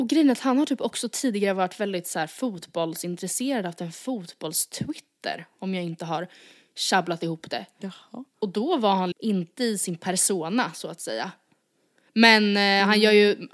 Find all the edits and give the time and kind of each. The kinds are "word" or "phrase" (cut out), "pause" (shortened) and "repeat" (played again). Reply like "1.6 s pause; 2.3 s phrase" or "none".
9.1 s word